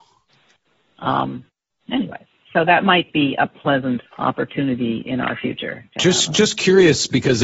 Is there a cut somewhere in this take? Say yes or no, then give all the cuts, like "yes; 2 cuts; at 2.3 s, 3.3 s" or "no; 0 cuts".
yes; 1 cut; at 4.1 s